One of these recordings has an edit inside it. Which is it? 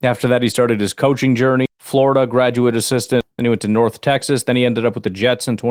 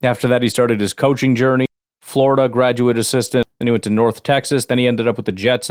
first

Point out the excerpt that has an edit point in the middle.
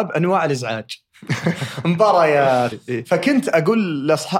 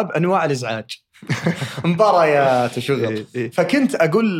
first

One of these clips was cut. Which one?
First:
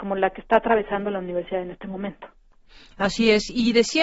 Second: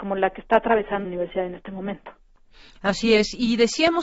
second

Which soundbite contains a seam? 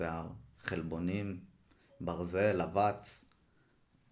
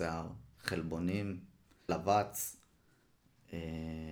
second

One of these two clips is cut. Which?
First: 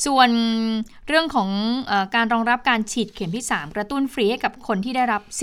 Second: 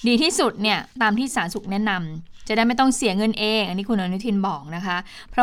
second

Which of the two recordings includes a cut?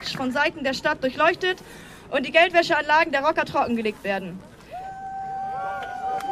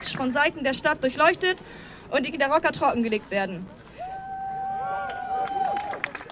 second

